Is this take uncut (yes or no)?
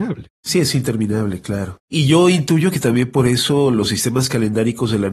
yes